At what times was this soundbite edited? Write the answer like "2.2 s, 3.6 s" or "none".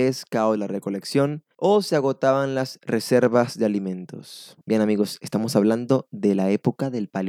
4.6 s